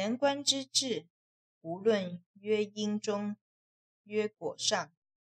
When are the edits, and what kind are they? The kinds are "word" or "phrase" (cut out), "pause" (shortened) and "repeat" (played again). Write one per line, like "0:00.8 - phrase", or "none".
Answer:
none